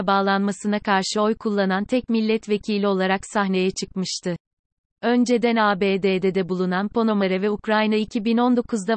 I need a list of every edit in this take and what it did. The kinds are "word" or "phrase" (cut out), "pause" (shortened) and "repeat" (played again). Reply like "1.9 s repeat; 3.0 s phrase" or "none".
none